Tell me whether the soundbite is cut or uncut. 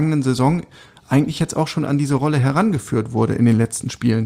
uncut